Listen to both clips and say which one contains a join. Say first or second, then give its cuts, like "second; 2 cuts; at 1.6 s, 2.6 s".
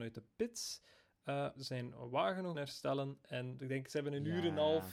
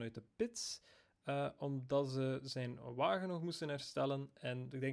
first; 2 cuts; at 1.6 s, 2.5 s